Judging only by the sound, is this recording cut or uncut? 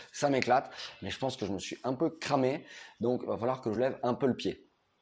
uncut